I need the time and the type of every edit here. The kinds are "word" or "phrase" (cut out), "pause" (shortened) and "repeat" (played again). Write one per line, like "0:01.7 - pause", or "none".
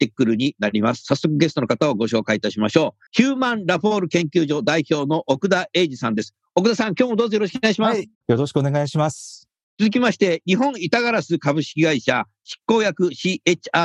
0:03.1 - pause
0:09.6 - pause

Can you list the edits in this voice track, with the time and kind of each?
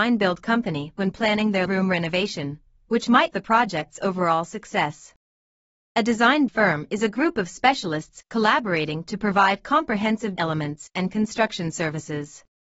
0:01.7 - word
0:03.3 - word
0:06.5 - word
0:10.4 - word

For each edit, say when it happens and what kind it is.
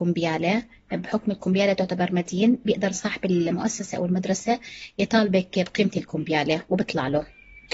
none

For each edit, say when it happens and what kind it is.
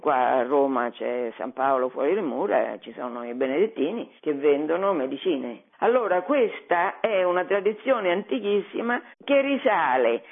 0:04.2 - pause
0:05.7 - pause
0:09.1 - pause

